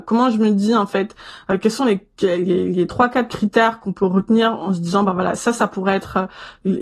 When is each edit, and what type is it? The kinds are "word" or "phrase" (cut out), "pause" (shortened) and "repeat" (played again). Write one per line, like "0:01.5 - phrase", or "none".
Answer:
none